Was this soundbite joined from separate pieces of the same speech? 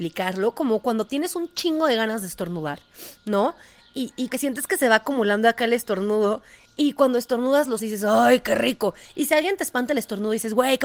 yes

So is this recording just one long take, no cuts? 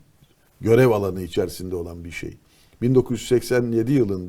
yes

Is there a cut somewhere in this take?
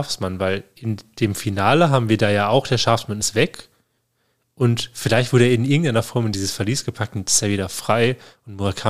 no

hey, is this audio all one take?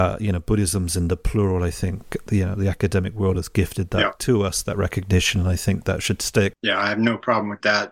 yes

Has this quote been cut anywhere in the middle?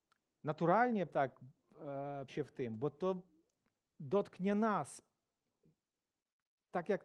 yes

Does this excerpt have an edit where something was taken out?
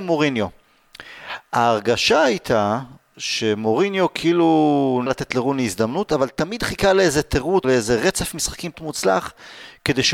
yes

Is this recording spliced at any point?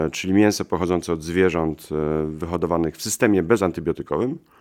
no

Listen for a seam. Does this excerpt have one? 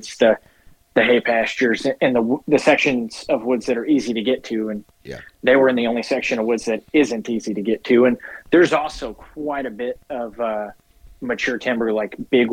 no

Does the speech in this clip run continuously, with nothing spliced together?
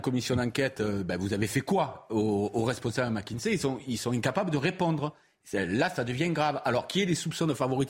yes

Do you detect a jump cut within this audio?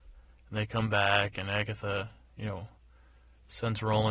no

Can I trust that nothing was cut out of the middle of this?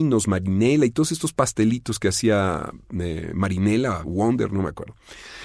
no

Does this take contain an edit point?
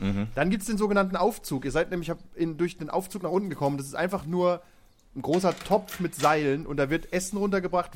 no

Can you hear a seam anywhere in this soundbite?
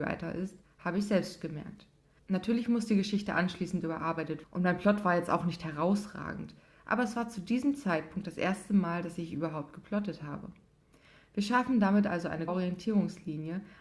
yes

